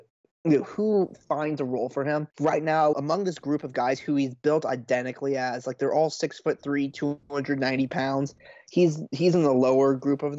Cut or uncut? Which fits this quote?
cut